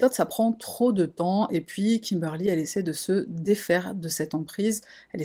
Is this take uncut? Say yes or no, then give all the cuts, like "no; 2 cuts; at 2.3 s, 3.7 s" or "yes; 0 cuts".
yes; 0 cuts